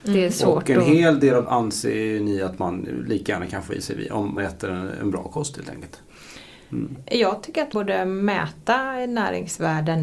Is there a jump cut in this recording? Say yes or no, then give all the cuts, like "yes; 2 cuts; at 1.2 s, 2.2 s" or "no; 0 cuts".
yes; 3 cuts; at 1.4 s, 4.4 s, 7.7 s